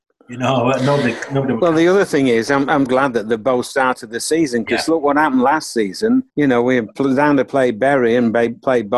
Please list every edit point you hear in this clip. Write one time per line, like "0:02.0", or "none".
0:02.9
0:06.3